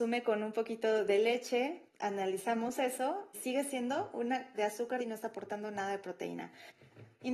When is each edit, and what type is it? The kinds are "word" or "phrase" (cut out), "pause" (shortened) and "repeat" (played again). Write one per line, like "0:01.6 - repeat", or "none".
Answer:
0:01.9 - pause
0:03.3 - word
0:04.5 - word
0:05.0 - word